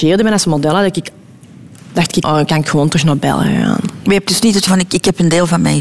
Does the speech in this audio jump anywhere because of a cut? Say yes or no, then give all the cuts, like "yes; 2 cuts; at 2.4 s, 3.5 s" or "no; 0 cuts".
yes; 2 cuts; at 2.2 s, 4.7 s